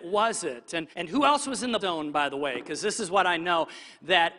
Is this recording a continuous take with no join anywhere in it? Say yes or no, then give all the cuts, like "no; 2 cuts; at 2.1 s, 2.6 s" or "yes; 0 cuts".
no; 2 cuts; at 0.9 s, 1.8 s